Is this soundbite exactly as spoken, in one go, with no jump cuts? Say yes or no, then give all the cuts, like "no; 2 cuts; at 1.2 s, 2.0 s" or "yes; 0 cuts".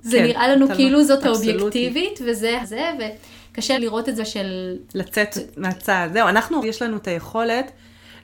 no; 6 cuts; at 1.2 s, 2.6 s, 3.7 s, 4.2 s, 4.9 s, 6.6 s